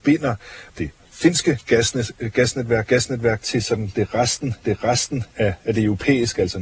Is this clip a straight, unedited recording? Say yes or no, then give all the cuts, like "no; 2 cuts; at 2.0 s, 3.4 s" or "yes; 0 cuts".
no; 2 cuts; at 2.9 s, 4.6 s